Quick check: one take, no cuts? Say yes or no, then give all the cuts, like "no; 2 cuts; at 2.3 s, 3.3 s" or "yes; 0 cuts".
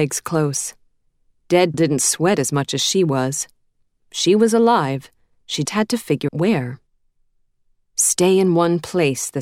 no; 3 cuts; at 1.7 s, 5.6 s, 6.3 s